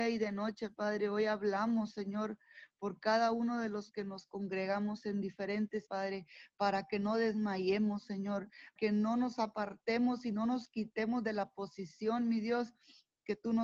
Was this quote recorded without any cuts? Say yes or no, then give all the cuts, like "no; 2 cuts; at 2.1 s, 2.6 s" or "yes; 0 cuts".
no; 2 cuts; at 5.9 s, 8.8 s